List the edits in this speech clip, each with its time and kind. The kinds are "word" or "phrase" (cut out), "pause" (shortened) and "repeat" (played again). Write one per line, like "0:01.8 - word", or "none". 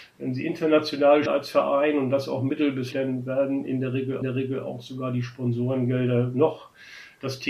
0:01.3 - word
0:02.9 - word
0:04.2 - repeat